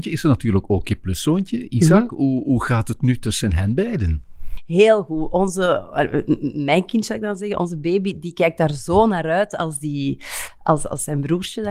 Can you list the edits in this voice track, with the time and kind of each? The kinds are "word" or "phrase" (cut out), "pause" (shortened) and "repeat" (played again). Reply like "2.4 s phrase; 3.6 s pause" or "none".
none